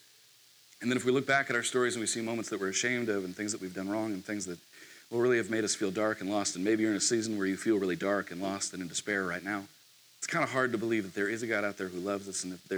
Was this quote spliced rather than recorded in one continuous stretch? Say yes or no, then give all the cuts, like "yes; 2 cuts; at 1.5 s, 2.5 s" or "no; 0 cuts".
yes; 1 cut; at 9.8 s